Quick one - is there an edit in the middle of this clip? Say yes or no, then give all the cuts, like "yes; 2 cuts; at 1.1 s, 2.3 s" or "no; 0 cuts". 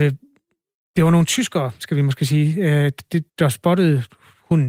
yes; 1 cut; at 3.3 s